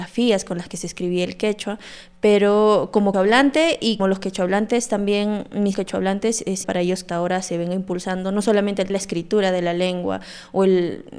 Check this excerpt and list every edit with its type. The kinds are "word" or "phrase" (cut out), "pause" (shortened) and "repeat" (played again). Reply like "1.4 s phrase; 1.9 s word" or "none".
3.1 s word; 4.0 s word; 5.7 s word; 6.6 s word; 7.1 s word; 8.9 s word